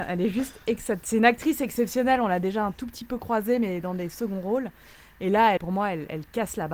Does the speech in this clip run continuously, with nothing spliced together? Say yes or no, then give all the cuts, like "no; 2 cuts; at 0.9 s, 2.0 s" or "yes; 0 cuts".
no; 1 cut; at 5.6 s